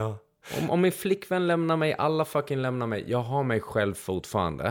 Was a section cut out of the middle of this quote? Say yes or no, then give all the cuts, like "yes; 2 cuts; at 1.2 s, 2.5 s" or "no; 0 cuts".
no; 0 cuts